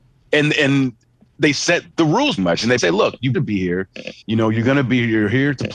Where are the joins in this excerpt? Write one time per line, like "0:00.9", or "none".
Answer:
0:01.9
0:02.4
0:02.8
0:03.3
0:04.2